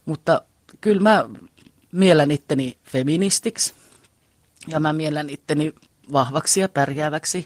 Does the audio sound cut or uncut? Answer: uncut